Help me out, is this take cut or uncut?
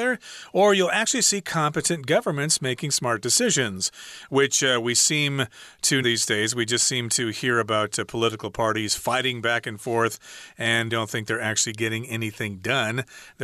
cut